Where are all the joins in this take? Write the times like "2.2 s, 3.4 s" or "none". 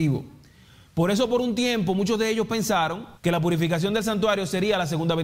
3.2 s